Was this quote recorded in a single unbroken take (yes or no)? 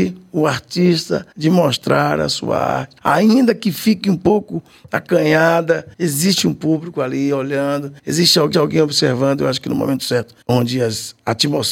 no